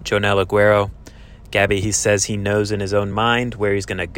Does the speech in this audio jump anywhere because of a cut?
no; 0 cuts

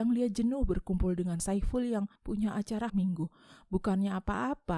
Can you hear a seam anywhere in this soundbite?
yes; 3 cuts; at 1.4 s, 2.2 s, 2.9 s

